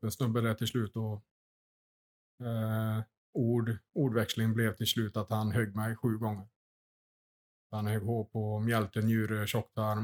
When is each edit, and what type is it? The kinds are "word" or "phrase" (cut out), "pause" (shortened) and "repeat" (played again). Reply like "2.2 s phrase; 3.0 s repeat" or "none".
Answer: none